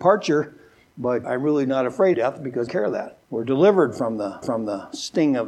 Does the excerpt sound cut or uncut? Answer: cut